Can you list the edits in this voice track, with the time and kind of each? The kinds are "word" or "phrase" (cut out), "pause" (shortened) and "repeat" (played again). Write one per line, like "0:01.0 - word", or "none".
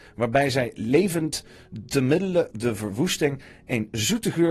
0:02.5 - word